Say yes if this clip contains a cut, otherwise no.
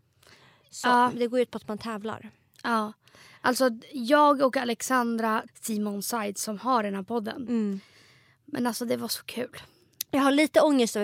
yes